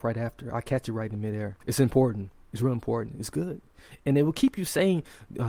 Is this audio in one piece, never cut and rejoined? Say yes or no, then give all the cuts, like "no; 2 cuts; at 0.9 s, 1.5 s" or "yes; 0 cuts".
no; 1 cut; at 1.6 s